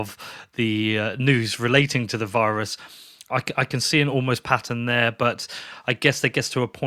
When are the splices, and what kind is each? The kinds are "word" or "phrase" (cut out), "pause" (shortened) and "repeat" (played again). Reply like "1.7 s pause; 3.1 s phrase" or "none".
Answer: none